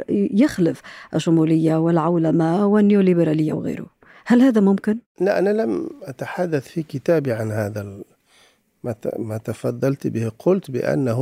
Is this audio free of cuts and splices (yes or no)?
no